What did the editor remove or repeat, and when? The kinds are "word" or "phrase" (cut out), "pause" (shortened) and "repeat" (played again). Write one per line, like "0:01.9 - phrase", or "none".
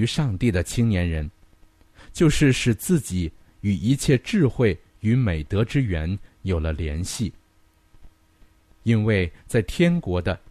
none

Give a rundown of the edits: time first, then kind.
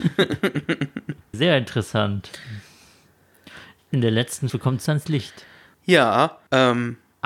0:01.3 - word
0:04.5 - word
0:04.9 - word

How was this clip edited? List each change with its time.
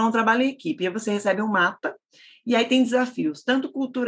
none

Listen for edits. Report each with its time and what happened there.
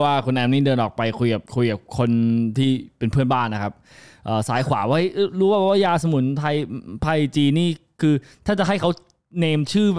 0:01.5 - pause

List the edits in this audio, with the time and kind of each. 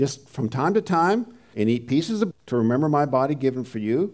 0:01.5 - word
0:02.3 - word

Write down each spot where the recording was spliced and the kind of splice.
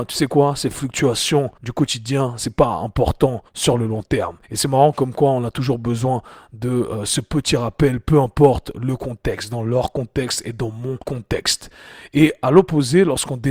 0:01.6 - pause
0:03.5 - pause
0:04.4 - pause
0:11.0 - pause

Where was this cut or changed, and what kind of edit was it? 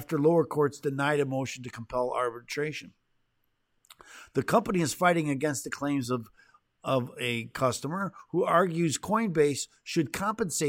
none

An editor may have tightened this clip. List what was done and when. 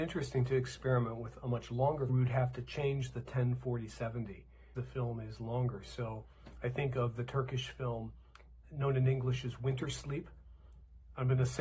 0:02.1 - phrase
0:04.7 - word
0:08.6 - word

